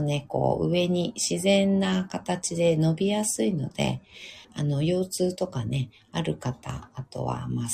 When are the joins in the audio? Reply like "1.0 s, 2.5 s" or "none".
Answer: 4.4 s